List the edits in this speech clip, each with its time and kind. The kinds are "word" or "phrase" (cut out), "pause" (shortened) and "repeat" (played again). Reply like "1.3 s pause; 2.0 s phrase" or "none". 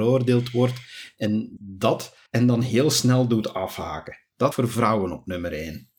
1.6 s word; 2.3 s pause; 4.5 s word